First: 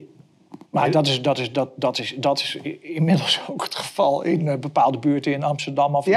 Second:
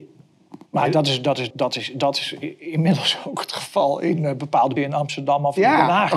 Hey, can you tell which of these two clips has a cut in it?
second; 2 cuts; at 1.5 s, 4.8 s

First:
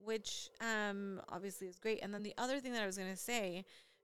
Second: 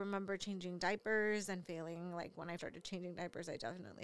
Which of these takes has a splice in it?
second; 1 cut; at 2.6 s

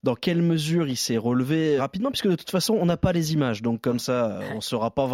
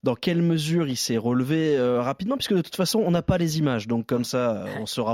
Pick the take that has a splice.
first; 1 cut; at 1.8 s

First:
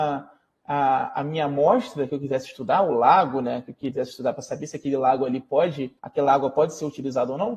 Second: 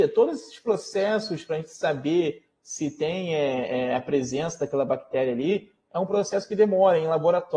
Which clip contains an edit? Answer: first; 1 cut; at 6.0 s

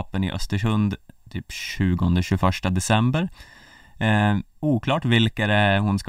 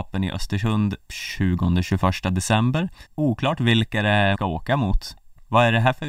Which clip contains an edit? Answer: second; 3 cuts; at 1.1 s, 3.1 s, 4.3 s

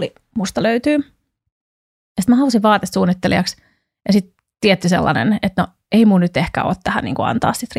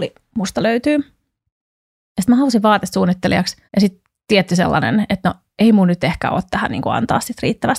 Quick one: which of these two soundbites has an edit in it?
second; 1 cut; at 3.7 s

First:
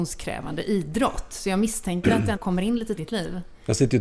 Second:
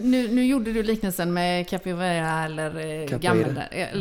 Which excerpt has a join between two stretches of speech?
first; 2 cuts; at 2.3 s, 3.0 s

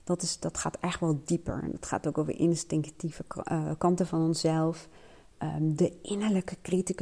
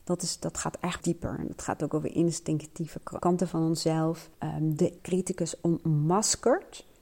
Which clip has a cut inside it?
second; 4 cuts; at 1.0 s, 3.2 s, 4.3 s, 5.0 s

